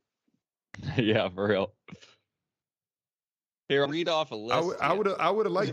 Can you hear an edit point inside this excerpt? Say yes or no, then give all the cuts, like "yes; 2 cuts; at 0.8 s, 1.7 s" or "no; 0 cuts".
yes; 1 cut; at 3.9 s